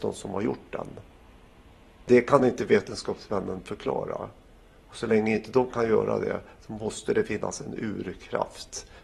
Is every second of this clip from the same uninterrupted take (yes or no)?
yes